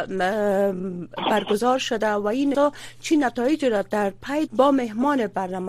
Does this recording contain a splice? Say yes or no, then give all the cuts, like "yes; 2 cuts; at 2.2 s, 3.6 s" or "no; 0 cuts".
yes; 2 cuts; at 2.5 s, 4.5 s